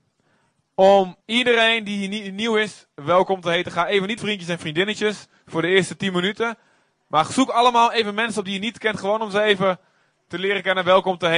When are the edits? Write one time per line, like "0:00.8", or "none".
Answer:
0:01.2
0:04.2